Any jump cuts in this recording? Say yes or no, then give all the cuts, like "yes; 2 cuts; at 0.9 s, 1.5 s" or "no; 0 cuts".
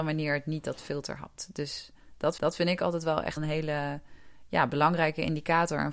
yes; 2 cuts; at 2.4 s, 3.4 s